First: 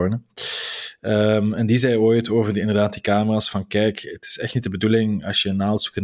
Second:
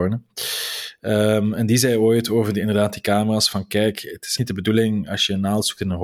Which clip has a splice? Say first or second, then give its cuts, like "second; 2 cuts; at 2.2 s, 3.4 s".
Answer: second; 1 cut; at 4.4 s